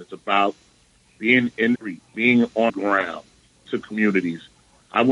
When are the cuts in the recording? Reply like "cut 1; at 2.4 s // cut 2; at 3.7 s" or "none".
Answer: cut 1; at 1.8 s // cut 2; at 2.1 s // cut 3; at 2.7 s // cut 4; at 3.7 s